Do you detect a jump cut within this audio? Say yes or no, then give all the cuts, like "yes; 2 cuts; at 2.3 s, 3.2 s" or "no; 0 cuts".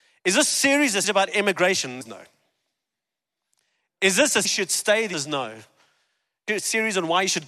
yes; 5 cuts; at 1.0 s, 2.0 s, 4.4 s, 5.1 s, 6.5 s